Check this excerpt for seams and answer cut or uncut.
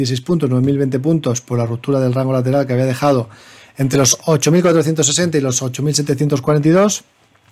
uncut